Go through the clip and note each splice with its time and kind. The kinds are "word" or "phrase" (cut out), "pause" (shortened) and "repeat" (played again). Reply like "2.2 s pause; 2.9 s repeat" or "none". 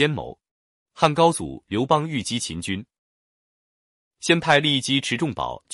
none